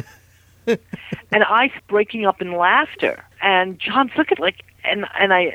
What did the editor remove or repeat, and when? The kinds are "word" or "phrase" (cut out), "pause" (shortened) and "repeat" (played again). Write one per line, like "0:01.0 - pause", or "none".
0:01.8 - word
0:03.3 - pause
0:04.3 - phrase